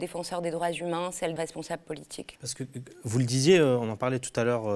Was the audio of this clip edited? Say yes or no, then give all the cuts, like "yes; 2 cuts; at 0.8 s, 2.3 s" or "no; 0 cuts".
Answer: yes; 2 cuts; at 1.4 s, 2.3 s